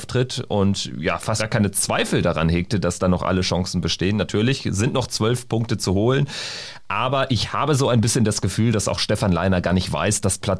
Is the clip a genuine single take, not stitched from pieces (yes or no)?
no